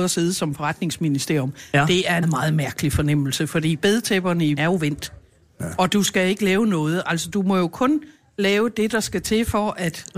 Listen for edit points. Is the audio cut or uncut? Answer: cut